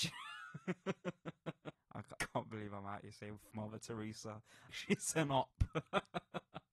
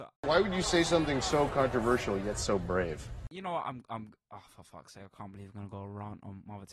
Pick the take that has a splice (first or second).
first